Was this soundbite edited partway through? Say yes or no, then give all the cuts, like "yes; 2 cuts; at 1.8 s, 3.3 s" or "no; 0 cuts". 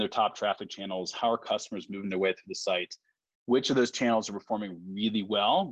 no; 0 cuts